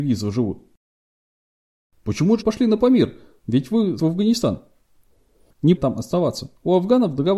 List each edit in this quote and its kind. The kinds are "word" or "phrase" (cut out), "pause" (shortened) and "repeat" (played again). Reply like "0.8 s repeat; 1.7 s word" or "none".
2.4 s word; 4.0 s word; 5.8 s word